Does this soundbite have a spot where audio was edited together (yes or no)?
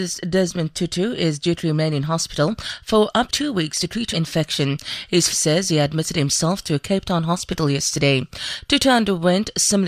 yes